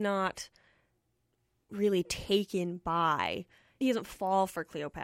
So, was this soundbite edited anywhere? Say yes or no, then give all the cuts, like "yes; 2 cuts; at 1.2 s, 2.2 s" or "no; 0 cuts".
yes; 1 cut; at 3.8 s